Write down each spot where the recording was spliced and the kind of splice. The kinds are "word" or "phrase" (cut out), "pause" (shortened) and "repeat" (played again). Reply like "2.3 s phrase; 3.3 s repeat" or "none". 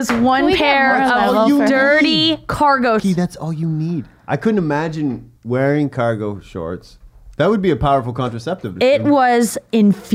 3.0 s word; 5.4 s pause; 8.8 s phrase